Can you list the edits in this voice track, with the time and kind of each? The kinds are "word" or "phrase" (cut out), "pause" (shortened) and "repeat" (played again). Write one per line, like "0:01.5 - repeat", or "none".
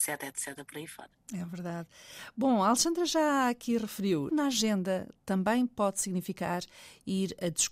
0:04.3 - word

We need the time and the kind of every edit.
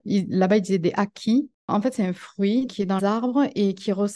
0:01.6 - pause
0:02.7 - word
0:03.0 - word

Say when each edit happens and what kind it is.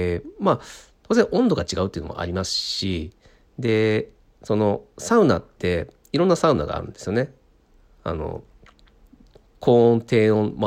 none

